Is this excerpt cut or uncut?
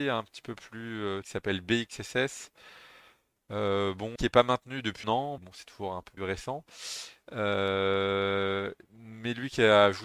cut